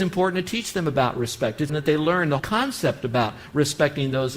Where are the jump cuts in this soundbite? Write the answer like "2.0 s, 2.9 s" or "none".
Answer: 1.7 s, 2.4 s